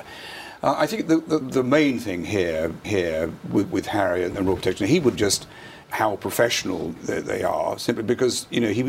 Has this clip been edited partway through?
yes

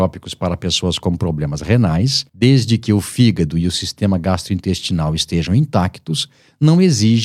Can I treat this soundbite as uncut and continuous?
no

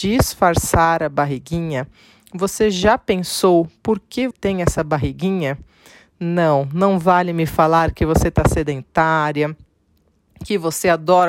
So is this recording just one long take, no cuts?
no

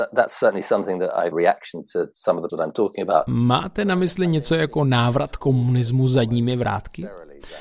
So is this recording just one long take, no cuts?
no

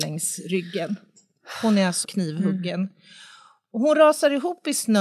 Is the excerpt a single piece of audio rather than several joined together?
no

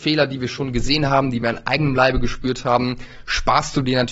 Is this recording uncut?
yes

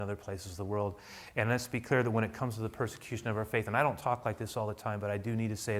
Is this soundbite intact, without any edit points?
yes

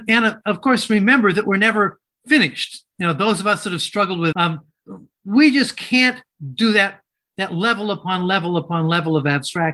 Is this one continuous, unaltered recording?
no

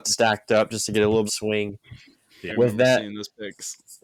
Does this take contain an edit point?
yes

